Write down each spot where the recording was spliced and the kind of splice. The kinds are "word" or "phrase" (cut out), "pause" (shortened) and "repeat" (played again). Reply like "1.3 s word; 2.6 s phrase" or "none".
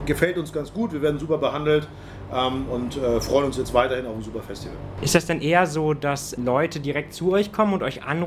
6.4 s word